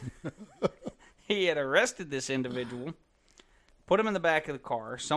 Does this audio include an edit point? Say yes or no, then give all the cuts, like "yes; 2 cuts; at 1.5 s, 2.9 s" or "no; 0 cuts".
no; 0 cuts